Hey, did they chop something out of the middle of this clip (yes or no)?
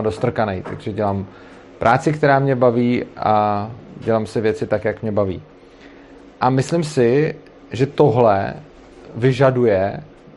no